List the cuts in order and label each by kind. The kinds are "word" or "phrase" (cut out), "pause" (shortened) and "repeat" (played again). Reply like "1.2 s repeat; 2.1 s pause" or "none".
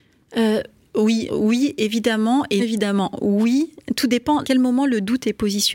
1.3 s word; 2.6 s word; 4.4 s word